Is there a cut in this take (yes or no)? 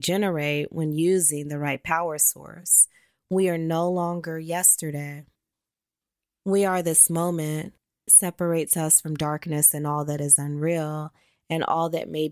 yes